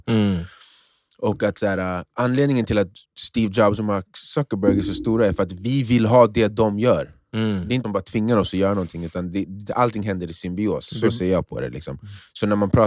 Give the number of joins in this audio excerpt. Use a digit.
2